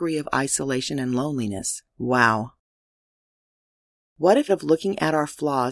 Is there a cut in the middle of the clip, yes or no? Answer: yes